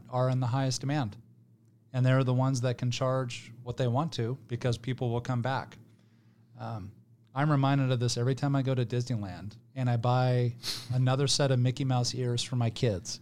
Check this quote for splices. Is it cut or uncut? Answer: uncut